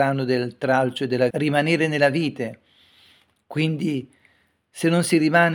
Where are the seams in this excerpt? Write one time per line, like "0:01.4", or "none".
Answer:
0:01.3